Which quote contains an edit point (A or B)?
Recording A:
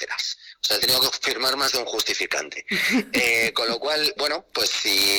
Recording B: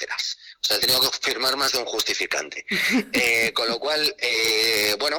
A